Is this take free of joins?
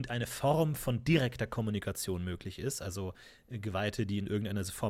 yes; 0 cuts

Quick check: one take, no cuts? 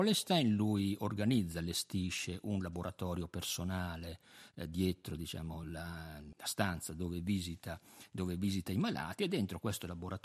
yes; 0 cuts

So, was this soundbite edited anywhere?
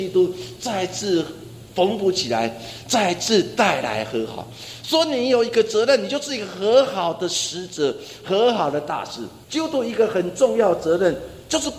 yes; 1 cut; at 9.4 s

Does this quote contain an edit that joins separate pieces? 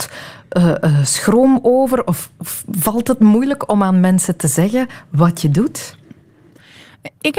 no; 0 cuts

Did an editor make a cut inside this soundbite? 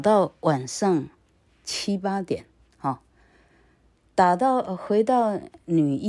no; 0 cuts

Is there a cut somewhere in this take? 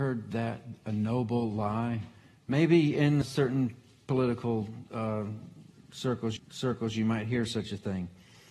yes; 2 cuts; at 3.2 s, 6.4 s

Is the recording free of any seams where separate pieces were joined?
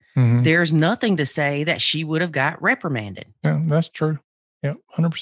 no; 1 cut; at 3.3 s

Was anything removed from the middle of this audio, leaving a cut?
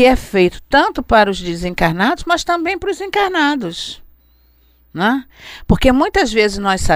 no; 0 cuts

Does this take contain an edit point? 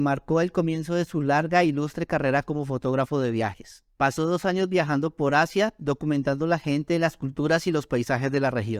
yes; 1 cut; at 3.9 s

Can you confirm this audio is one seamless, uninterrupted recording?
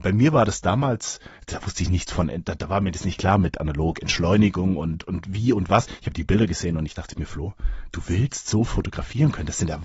yes; 0 cuts

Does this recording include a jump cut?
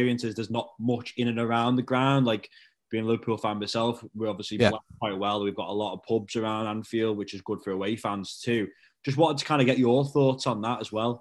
no; 0 cuts

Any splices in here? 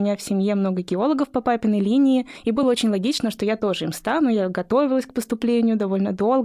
no; 0 cuts

